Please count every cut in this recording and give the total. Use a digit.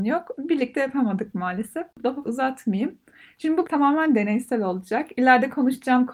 2